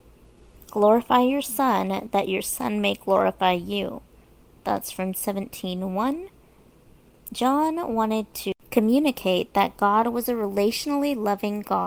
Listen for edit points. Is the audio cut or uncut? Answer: cut